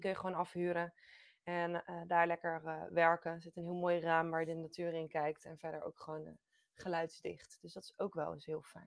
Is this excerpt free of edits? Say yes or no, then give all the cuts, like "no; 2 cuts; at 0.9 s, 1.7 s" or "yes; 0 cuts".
yes; 0 cuts